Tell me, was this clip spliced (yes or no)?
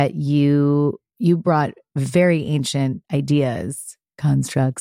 yes